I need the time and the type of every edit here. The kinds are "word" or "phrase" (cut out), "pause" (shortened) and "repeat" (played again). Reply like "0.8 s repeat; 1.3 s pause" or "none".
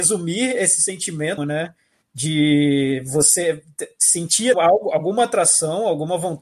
1.4 s phrase; 4.5 s word